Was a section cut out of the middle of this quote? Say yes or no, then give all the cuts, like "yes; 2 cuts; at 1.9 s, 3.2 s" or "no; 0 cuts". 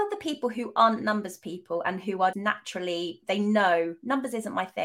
yes; 1 cut; at 2.3 s